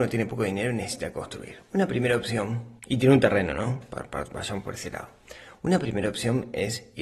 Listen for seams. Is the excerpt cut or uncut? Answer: cut